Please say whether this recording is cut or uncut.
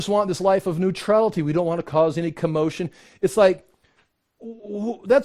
uncut